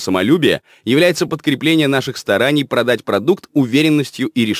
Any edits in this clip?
no; 0 cuts

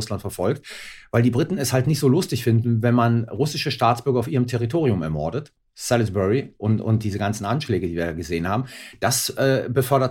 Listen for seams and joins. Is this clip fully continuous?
yes; 0 cuts

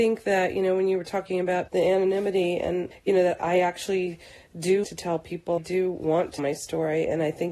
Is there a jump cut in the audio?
yes; 6 cuts; at 1.7 s, 2.9 s, 3.4 s, 4.8 s, 5.6 s, 6.4 s

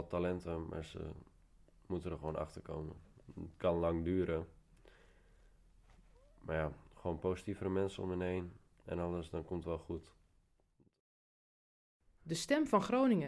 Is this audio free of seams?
yes; 0 cuts

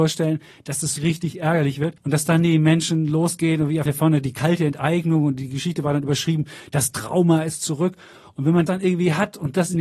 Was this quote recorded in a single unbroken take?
no; 4 cuts; at 1.0 s, 2.0 s, 3.9 s, 8.7 s

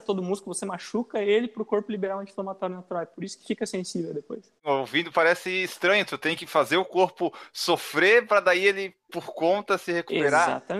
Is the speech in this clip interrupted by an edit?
yes; 1 cut; at 4.6 s

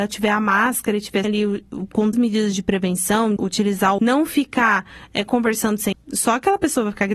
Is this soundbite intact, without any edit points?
no; 5 cuts; at 1.2 s, 2.1 s, 3.4 s, 4.0 s, 5.9 s

